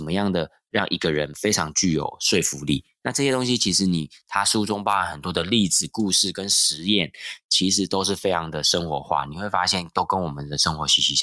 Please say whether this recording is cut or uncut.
uncut